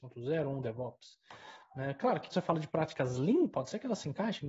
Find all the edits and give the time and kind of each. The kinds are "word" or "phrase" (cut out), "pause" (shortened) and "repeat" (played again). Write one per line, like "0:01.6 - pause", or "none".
0:02.3 - word